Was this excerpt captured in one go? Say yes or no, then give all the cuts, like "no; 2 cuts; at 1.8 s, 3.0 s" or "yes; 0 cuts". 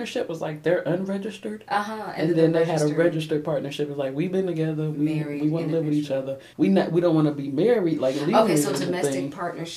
no; 1 cut; at 6.5 s